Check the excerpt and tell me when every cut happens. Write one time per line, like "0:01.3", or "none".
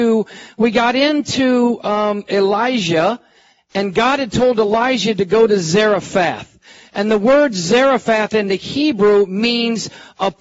none

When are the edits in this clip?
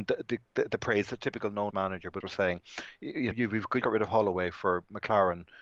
0:01.2
0:01.7
0:02.2
0:03.3
0:03.8

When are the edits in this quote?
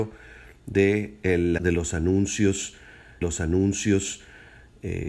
0:01.6
0:03.2

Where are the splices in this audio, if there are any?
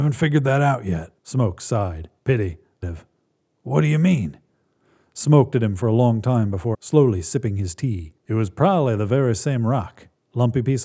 0:01.2
0:02.2
0:02.8
0:05.5
0:06.7
0:08.2

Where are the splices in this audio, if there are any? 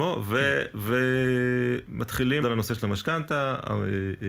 0:02.4

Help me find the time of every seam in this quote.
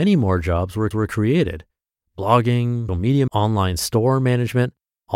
0:00.9
0:02.9
0:03.3

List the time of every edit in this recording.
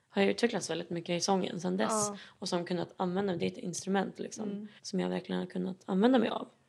0:04.8

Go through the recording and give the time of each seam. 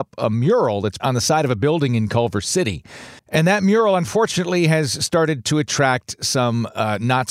0:01.0
0:03.2

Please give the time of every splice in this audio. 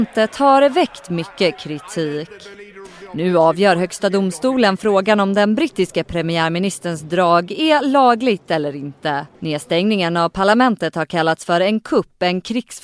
0:09.3

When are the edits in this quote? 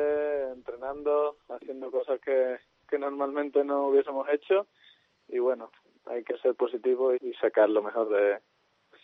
0:07.1

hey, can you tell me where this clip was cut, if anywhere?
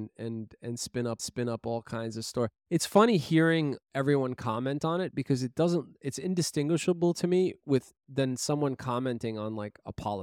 0:01.2
0:02.6
0:03.8

